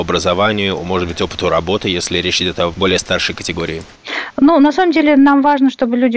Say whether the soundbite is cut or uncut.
uncut